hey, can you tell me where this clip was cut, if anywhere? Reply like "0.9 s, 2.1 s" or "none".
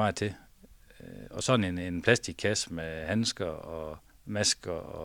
4.1 s